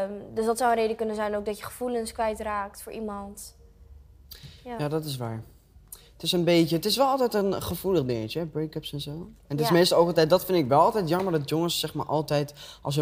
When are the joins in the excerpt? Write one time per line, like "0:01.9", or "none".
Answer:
0:05.7